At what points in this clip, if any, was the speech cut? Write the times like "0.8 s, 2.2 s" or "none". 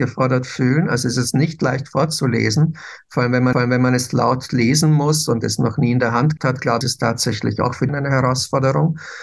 3.5 s, 6.4 s, 6.8 s, 7.9 s